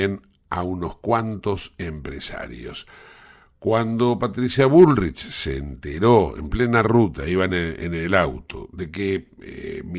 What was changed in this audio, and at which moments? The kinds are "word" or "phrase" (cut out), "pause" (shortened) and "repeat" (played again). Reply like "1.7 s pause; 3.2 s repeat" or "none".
none